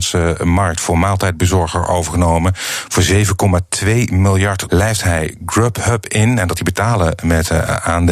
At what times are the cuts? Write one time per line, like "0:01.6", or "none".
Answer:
0:04.7
0:06.6